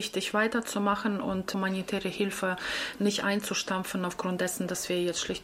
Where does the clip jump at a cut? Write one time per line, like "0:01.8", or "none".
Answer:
none